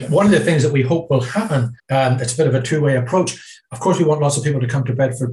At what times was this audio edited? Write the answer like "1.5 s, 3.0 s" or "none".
1.8 s